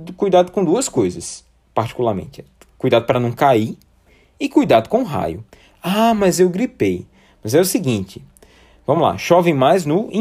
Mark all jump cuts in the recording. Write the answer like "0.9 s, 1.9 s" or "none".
none